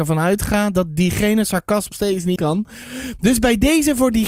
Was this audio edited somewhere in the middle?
yes; 2 cuts; at 1.9 s, 2.4 s

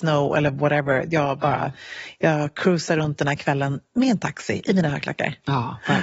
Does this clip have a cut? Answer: no; 0 cuts

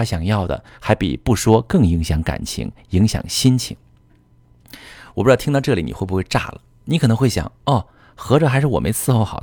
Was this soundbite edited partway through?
no; 0 cuts

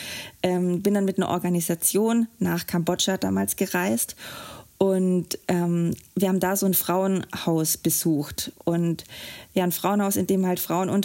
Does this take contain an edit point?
no; 0 cuts

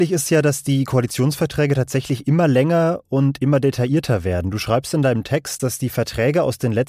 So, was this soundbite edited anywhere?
no; 0 cuts

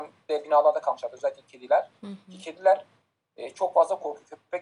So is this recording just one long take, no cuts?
yes; 0 cuts

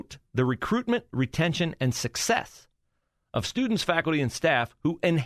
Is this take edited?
no; 0 cuts

